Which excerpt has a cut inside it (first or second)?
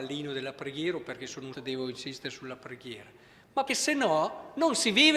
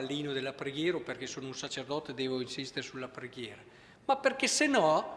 first